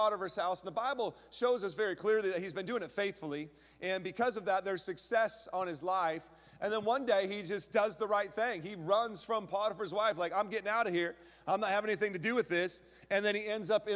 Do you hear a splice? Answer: no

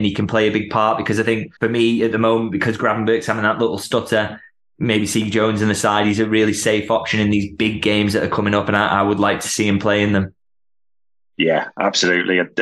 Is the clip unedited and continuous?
no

